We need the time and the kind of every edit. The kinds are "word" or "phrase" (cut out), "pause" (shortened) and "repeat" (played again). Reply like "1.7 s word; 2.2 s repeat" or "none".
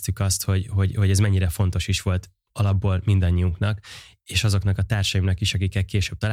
none